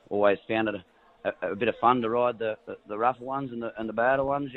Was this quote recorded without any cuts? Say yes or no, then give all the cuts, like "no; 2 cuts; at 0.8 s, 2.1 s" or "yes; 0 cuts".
yes; 0 cuts